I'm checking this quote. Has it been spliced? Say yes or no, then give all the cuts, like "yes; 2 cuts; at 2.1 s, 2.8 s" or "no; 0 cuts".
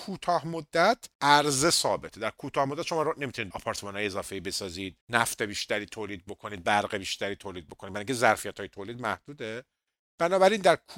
yes; 3 cuts; at 1.1 s, 3.5 s, 5.0 s